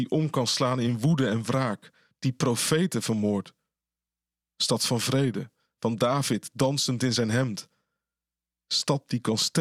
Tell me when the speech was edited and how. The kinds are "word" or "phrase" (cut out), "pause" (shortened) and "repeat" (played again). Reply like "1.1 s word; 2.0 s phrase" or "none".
none